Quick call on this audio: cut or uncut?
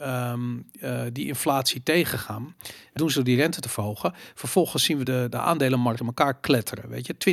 cut